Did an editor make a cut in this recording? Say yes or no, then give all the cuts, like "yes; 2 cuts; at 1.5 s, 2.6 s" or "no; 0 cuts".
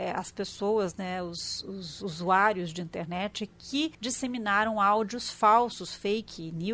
yes; 1 cut; at 3.9 s